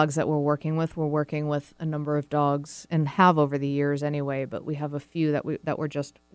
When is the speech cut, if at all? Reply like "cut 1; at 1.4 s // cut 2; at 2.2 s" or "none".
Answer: none